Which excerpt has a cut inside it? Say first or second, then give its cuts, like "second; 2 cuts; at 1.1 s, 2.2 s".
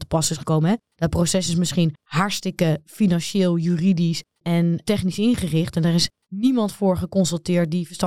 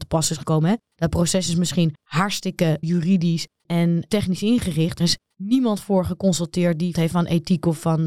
second; 3 cuts; at 2.8 s, 5.0 s, 6.9 s